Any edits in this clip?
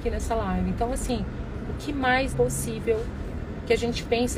yes; 1 cut; at 2.3 s

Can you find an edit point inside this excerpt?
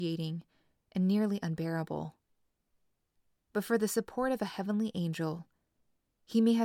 no; 0 cuts

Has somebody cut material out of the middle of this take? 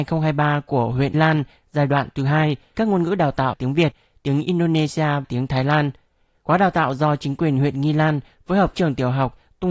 yes; 5 cuts; at 1.1 s, 2.7 s, 3.5 s, 5.2 s, 8.7 s

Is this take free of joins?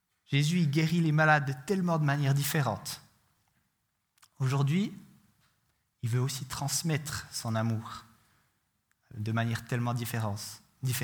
yes; 0 cuts

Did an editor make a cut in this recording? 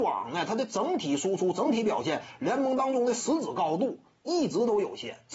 no; 0 cuts

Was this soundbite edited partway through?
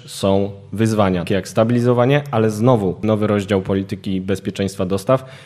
yes; 2 cuts; at 1.3 s, 3.0 s

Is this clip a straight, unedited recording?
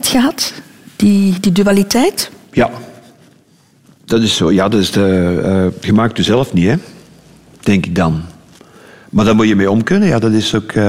yes; 0 cuts

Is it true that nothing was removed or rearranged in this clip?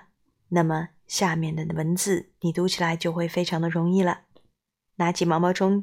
yes; 0 cuts

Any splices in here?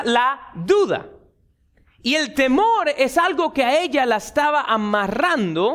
no; 0 cuts

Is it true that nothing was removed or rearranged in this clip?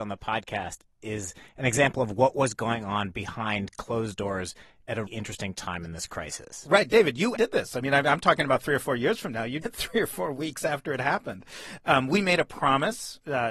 no; 3 cuts; at 5.1 s, 7.4 s, 9.6 s

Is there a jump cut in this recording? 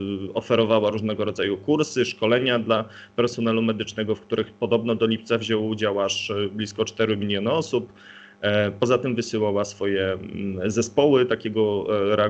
no; 0 cuts

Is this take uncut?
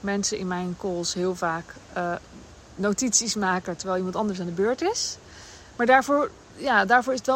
yes; 0 cuts

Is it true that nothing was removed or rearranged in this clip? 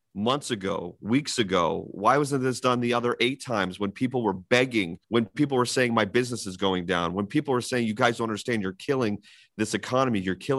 no; 1 cut; at 5.0 s

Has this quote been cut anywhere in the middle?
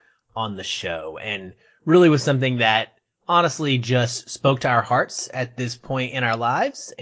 no; 0 cuts

